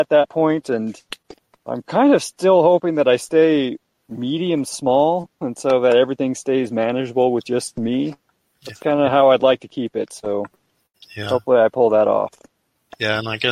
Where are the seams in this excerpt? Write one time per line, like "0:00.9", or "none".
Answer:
none